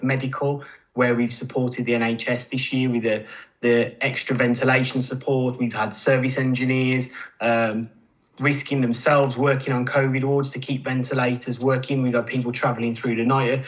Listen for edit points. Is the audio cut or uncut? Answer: uncut